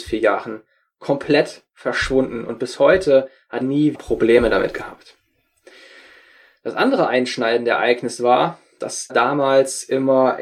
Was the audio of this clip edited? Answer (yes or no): yes